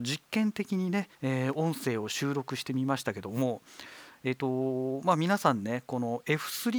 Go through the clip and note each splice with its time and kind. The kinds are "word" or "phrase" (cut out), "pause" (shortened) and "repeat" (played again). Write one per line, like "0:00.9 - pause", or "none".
0:01.1 - pause